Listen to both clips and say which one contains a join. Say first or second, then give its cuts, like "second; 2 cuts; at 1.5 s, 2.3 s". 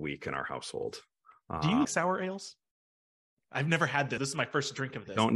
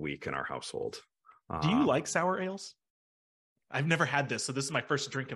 first; 2 cuts; at 1.8 s, 4.2 s